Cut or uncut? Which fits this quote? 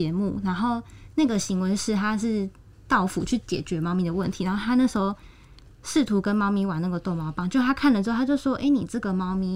uncut